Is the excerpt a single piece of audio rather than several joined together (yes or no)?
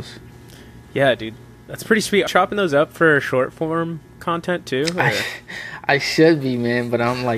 no